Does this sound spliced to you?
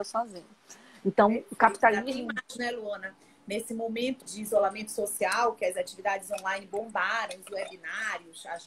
yes; 1 cut; at 4.2 s

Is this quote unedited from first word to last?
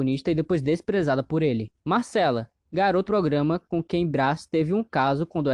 no; 2 cuts; at 1.8 s, 3.1 s

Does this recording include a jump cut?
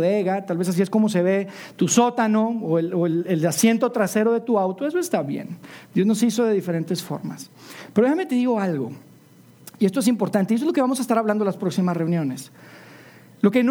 no; 0 cuts

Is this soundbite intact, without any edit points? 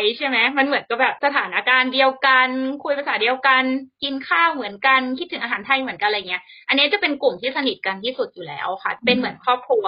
yes; 0 cuts

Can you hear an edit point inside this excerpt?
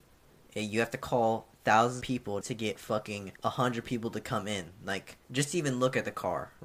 yes; 4 cuts; at 2.0 s, 2.4 s, 3.4 s, 5.2 s

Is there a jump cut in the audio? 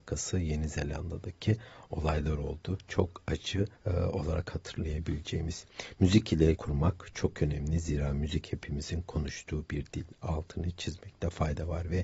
yes; 2 cuts; at 3.8 s, 6.6 s

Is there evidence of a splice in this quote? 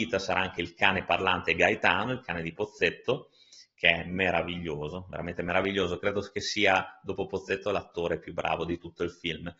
no; 0 cuts

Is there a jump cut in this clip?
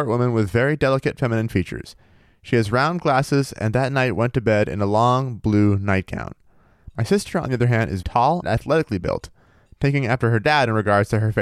yes; 2 cuts; at 8.0 s, 8.4 s

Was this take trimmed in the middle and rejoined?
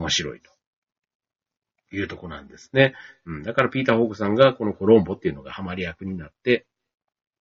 no; 0 cuts

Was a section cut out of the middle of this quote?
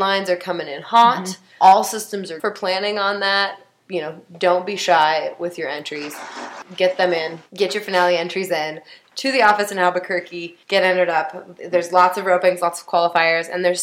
yes; 2 cuts; at 2.4 s, 10.6 s

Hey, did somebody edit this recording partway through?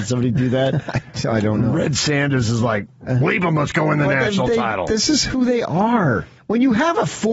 yes; 1 cut; at 6.4 s

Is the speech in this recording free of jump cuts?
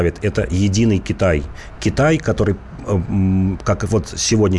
yes; 0 cuts

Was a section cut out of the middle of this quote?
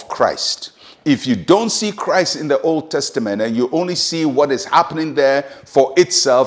no; 0 cuts

